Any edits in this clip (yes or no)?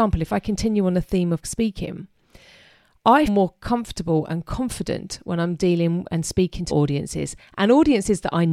yes